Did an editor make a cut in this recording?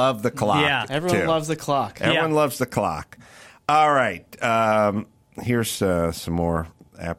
no; 0 cuts

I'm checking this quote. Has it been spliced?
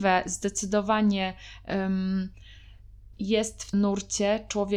yes; 2 cuts; at 3.1 s, 3.7 s

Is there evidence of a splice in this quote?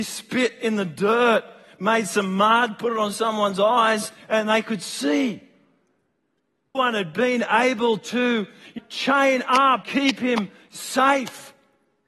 yes; 3 cuts; at 6.7 s, 8.8 s, 9.8 s

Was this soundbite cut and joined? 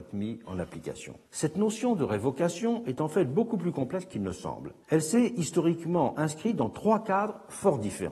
yes; 2 cuts; at 1.2 s, 4.8 s

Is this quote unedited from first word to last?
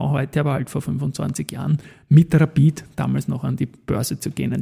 yes; 0 cuts

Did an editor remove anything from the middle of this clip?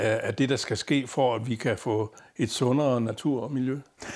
no; 0 cuts

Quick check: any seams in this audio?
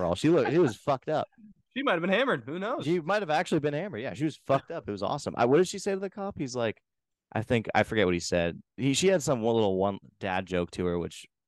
no; 0 cuts

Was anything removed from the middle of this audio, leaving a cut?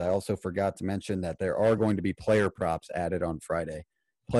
no; 0 cuts

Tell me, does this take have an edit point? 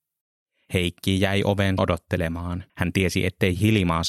yes; 2 cuts; at 1.8 s, 2.7 s

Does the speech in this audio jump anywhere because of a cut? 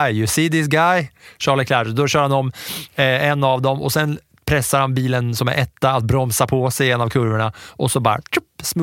no; 0 cuts

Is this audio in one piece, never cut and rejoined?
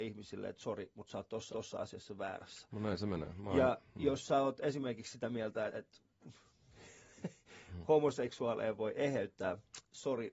no; 2 cuts; at 1.5 s, 5.7 s

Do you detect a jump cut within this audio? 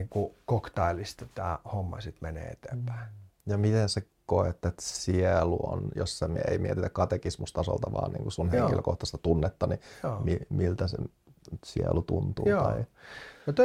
no; 0 cuts

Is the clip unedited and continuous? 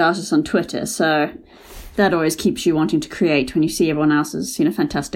yes; 0 cuts

